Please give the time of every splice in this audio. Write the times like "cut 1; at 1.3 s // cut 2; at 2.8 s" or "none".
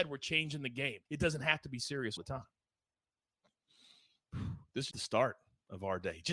cut 1; at 1.1 s // cut 2; at 2.2 s // cut 3; at 4.9 s